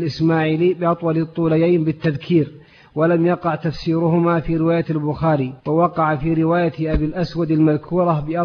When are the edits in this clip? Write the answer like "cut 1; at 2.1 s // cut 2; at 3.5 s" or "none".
cut 1; at 5.6 s